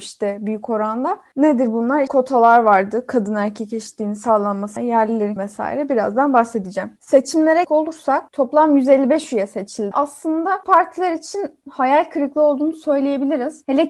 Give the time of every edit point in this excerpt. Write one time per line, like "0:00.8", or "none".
0:02.1
0:04.8
0:05.4
0:07.6
0:09.9
0:10.6